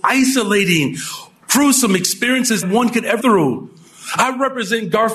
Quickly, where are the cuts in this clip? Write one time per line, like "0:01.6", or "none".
0:01.4
0:02.6
0:03.2